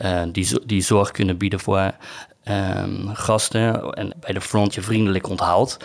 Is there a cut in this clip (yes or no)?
yes